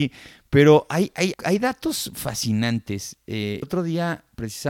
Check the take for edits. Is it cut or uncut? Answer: cut